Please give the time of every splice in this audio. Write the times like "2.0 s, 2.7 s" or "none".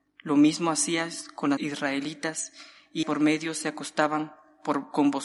1.6 s, 3.0 s